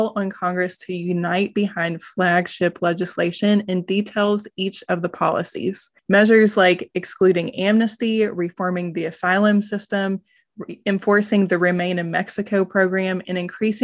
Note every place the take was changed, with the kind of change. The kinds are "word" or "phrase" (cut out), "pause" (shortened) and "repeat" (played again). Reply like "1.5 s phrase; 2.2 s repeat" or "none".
6.0 s pause